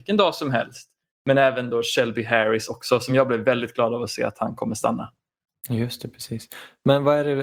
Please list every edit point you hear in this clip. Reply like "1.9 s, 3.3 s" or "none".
none